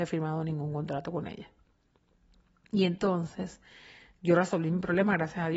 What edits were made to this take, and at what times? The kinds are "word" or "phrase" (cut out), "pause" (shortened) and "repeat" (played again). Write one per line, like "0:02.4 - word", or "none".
none